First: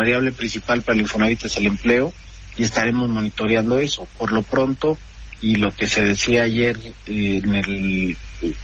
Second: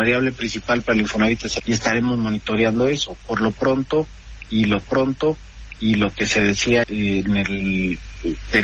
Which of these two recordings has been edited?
second; 3 cuts; at 1.6 s, 4.8 s, 6.8 s

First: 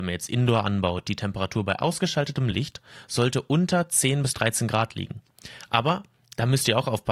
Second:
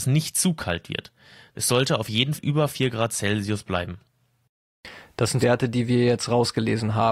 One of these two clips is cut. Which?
second; 2 cuts; at 2.3 s, 5.4 s

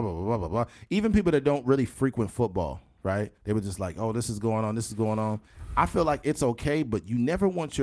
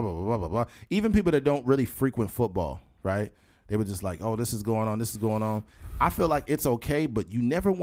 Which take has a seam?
first; 1 cut; at 3.4 s

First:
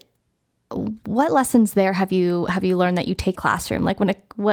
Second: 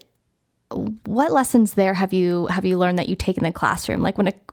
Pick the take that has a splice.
first; 1 cut; at 3.4 s

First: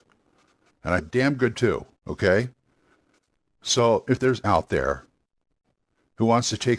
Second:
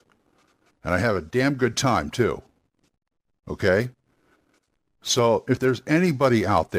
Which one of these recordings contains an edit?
first; 4 cuts; at 1.0 s, 1.5 s, 2.0 s, 4.4 s

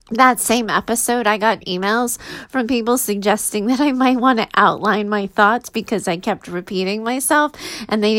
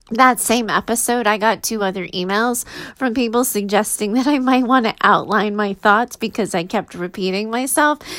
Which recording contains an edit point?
first; 1 cut; at 1.6 s

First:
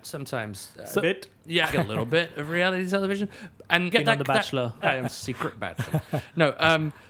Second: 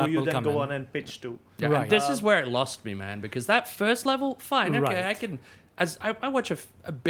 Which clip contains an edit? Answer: first; 3 cuts; at 1.7 s, 3.9 s, 4.8 s

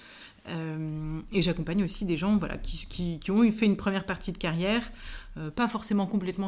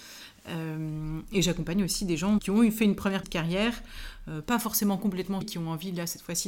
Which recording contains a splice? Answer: second; 3 cuts; at 2.4 s, 3.2 s, 5.4 s

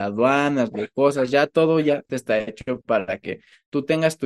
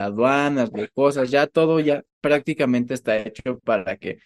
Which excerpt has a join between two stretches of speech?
first; 1 cut; at 2.1 s

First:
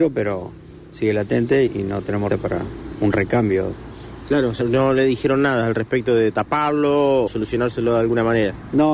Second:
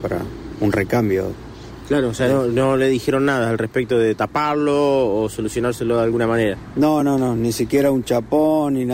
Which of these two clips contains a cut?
first; 4 cuts; at 1.7 s, 2.3 s, 4.6 s, 7.3 s

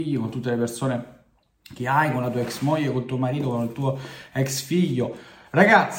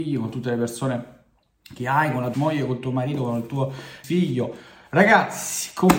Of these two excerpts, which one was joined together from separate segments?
second; 2 cuts; at 2.3 s, 4.0 s

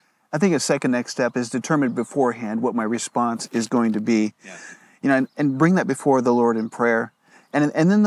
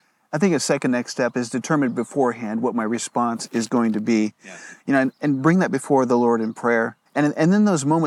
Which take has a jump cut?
second; 2 cuts; at 4.8 s, 7.1 s

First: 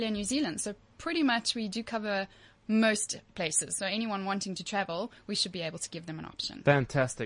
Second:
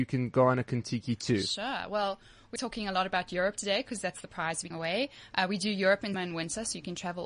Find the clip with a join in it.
second; 3 cuts; at 2.6 s, 4.7 s, 6.1 s

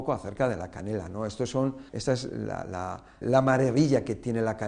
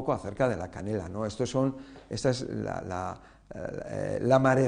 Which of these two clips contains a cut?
first; 2 cuts; at 1.9 s, 3.2 s

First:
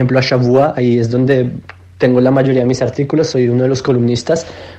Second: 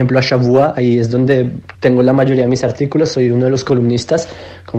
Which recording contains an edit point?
second; 1 cut; at 1.7 s

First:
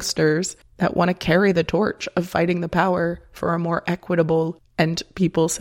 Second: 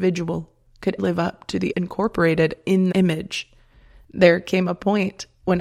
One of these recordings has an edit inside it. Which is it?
second; 3 cuts; at 1.0 s, 1.7 s, 2.9 s

